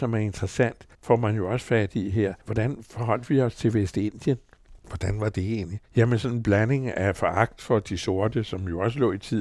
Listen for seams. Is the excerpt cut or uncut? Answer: cut